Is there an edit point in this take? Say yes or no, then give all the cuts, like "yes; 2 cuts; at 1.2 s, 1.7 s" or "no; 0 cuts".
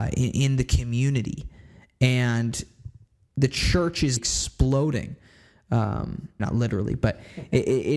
yes; 2 cuts; at 4.2 s, 6.4 s